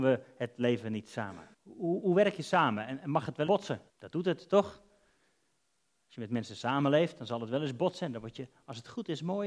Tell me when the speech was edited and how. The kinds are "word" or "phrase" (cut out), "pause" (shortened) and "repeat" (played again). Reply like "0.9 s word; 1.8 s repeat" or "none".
1.5 s pause; 3.5 s word; 3.9 s pause